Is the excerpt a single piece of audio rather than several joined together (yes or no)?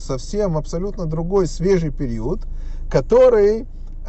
yes